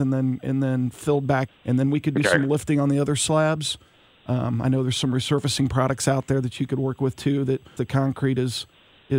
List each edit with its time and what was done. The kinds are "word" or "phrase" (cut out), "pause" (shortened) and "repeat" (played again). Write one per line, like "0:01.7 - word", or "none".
0:01.5 - word
0:07.8 - word